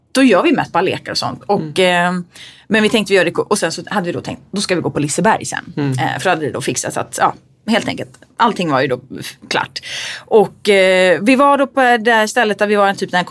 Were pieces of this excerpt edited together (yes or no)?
no